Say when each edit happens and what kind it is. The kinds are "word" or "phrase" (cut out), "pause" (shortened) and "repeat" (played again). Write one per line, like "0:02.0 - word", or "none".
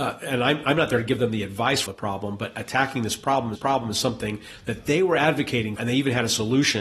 0:01.9 - phrase
0:03.5 - repeat
0:05.8 - word